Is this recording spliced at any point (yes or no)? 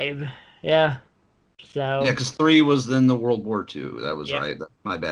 no